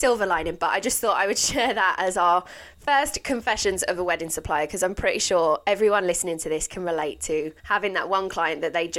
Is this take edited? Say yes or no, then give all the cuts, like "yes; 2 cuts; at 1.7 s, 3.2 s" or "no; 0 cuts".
yes; 1 cut; at 7.6 s